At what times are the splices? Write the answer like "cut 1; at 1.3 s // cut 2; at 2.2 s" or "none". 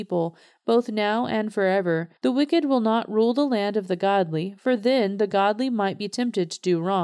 cut 1; at 2.2 s